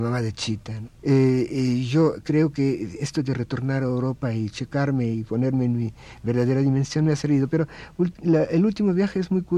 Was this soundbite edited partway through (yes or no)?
yes